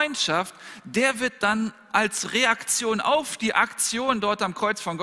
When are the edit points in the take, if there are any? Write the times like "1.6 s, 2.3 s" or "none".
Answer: none